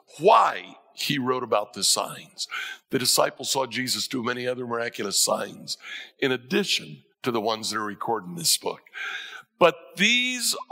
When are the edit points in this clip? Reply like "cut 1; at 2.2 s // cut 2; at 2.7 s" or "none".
cut 1; at 7.1 s